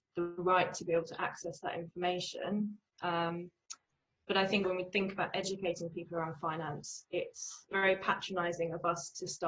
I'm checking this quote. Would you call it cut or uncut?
cut